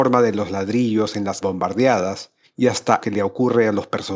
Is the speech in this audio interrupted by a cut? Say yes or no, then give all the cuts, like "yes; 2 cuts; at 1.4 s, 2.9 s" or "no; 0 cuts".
yes; 3 cuts; at 1.4 s, 2.4 s, 3.0 s